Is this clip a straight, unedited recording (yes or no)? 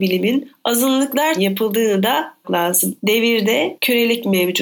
no